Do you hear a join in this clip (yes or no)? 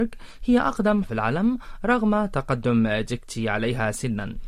yes